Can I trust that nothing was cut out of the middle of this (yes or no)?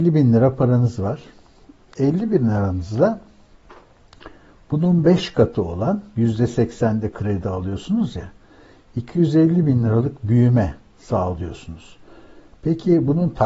yes